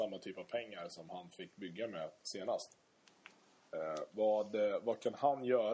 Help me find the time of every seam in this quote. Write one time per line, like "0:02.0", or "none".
none